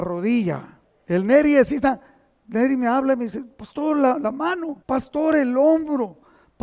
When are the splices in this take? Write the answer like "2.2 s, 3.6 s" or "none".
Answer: 4.8 s